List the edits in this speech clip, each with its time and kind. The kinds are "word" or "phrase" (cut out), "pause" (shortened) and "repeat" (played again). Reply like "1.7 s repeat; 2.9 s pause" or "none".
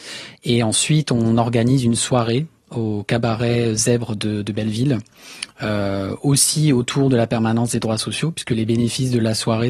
none